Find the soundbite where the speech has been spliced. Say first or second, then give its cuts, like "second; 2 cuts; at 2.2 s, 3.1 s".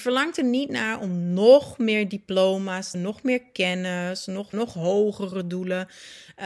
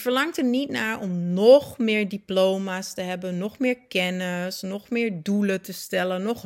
first; 2 cuts; at 2.9 s, 4.5 s